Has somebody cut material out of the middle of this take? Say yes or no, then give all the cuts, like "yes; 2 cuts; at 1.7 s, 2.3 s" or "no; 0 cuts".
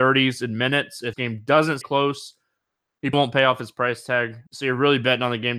yes; 4 cuts; at 1.1 s, 1.8 s, 3.1 s, 4.5 s